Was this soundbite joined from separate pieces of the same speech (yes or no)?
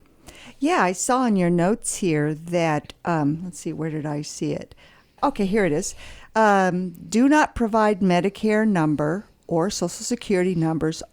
no